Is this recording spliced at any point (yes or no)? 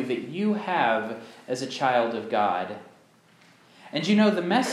no